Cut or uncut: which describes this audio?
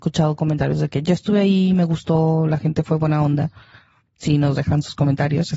uncut